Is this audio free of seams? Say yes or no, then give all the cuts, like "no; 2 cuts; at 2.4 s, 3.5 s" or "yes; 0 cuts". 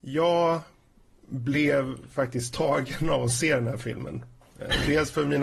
yes; 0 cuts